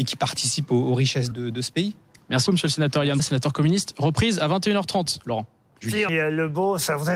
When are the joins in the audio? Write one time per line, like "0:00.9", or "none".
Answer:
0:01.3
0:02.5
0:03.2
0:06.1